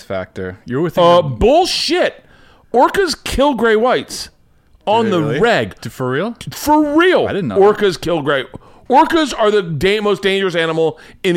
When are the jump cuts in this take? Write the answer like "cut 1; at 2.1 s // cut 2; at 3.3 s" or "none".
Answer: none